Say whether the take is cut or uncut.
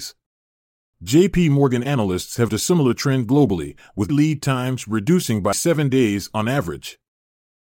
cut